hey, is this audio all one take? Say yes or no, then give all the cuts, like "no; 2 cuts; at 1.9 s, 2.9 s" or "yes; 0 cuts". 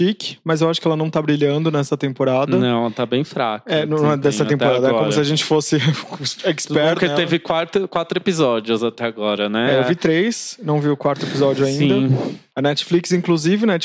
yes; 0 cuts